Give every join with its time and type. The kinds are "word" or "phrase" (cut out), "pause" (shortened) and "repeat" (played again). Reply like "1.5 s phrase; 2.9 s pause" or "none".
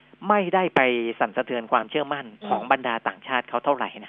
2.4 s pause